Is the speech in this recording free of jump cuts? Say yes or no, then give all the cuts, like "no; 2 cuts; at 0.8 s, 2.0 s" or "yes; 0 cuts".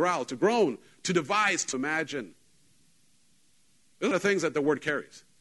no; 2 cuts; at 1.7 s, 4.1 s